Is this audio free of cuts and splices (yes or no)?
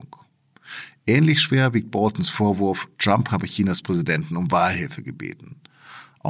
yes